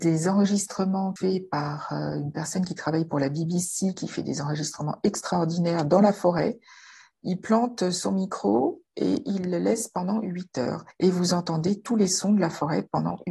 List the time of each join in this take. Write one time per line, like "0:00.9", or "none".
none